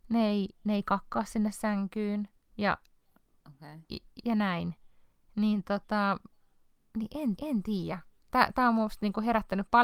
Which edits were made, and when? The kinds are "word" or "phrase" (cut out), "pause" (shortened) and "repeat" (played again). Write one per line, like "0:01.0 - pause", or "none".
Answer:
0:02.4 - pause
0:06.8 - word
0:07.4 - repeat